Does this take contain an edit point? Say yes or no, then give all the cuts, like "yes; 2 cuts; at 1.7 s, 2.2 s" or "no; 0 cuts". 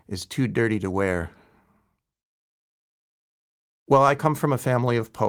no; 0 cuts